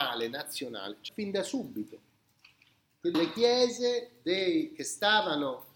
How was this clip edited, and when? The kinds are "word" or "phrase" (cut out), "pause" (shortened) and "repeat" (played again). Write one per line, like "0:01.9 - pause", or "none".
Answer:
0:01.1 - word
0:03.1 - word